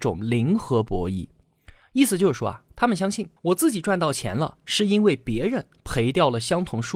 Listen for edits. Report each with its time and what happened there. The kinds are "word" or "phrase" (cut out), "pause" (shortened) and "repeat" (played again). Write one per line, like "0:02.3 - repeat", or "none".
0:03.4 - pause